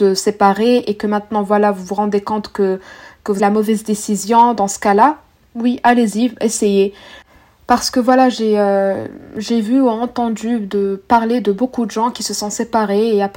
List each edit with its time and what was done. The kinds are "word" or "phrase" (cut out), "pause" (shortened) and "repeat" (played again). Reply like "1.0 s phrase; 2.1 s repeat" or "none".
3.4 s phrase